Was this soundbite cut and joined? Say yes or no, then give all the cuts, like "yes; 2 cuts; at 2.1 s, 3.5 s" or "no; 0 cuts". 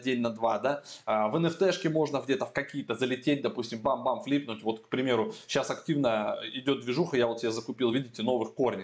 no; 0 cuts